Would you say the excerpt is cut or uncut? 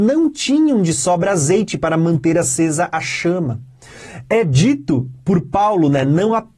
uncut